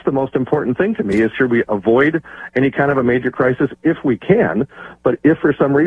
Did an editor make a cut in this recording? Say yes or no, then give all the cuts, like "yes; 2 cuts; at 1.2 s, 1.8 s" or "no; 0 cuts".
yes; 1 cut; at 1.3 s